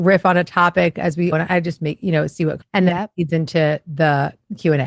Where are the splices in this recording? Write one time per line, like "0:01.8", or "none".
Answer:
0:01.3
0:02.6